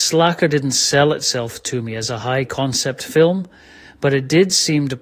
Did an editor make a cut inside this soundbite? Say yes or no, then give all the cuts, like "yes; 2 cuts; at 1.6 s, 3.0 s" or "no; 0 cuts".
no; 0 cuts